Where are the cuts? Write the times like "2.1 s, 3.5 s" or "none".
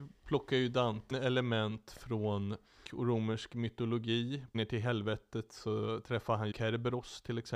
1.1 s, 2.8 s, 4.5 s, 6.5 s